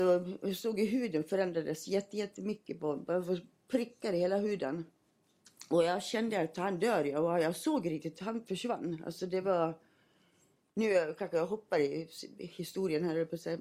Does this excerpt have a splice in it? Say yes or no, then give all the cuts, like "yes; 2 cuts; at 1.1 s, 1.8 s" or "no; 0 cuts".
no; 0 cuts